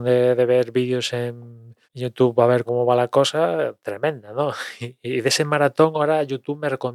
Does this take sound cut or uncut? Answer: cut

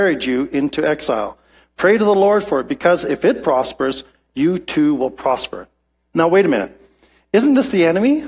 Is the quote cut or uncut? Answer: uncut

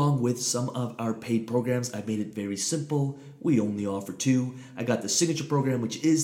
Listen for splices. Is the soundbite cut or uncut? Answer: uncut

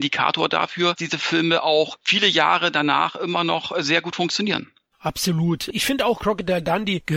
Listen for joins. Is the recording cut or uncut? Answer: cut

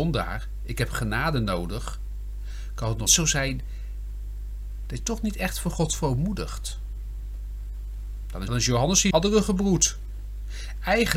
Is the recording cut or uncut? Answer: cut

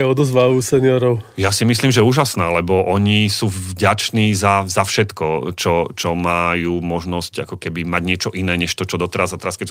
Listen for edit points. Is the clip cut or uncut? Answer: uncut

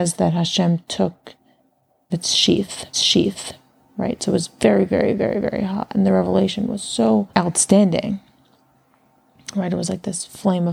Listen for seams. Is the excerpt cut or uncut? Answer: cut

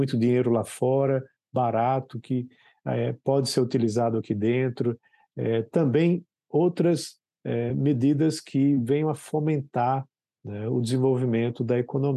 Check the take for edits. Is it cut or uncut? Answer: uncut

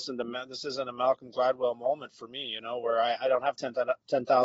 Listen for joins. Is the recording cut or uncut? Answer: uncut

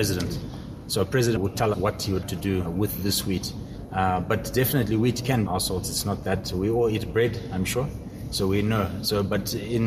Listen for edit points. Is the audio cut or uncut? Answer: cut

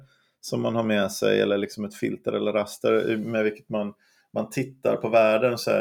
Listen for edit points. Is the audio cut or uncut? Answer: uncut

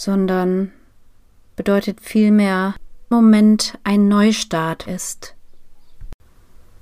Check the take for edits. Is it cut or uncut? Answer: cut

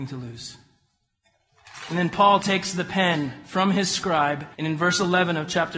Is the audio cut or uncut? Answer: cut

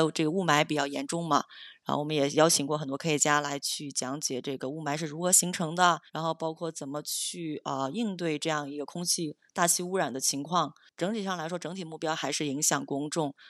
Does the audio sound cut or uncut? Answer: cut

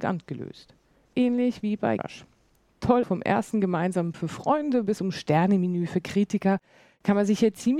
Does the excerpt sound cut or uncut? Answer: cut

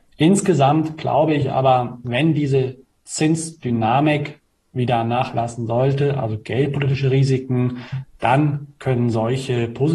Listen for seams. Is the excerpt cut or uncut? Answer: uncut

